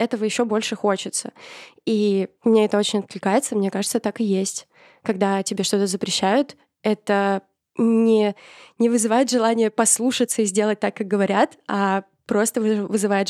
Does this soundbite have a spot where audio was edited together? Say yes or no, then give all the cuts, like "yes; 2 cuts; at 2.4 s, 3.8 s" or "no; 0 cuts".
no; 0 cuts